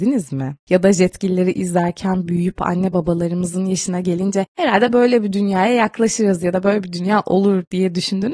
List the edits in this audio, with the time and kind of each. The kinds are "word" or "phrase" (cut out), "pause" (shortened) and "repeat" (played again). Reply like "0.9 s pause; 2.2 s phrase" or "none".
none